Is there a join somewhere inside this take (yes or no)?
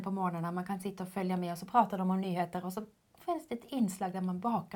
no